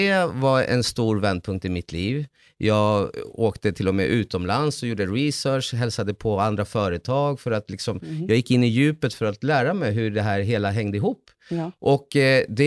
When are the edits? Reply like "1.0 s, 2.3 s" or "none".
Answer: none